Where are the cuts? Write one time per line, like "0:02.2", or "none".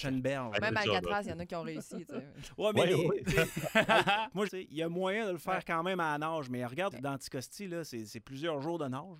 0:03.2
0:04.5
0:06.9